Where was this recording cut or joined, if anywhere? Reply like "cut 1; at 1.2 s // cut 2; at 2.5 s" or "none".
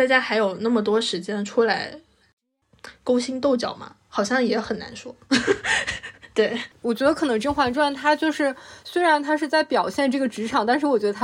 none